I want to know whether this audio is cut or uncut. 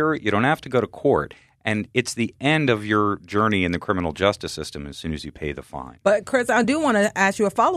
uncut